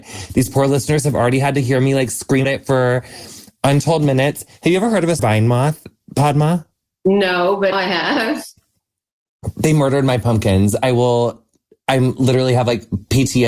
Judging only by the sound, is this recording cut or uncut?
cut